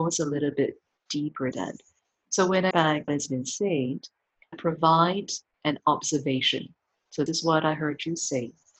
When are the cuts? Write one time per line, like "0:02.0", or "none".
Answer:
0:01.5
0:02.7
0:03.1
0:04.5
0:05.5
0:07.3